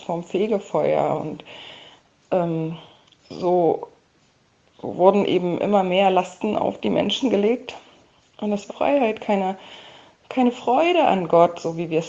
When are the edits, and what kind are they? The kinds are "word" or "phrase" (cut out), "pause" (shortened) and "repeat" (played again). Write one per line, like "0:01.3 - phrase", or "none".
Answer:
0:08.7 - phrase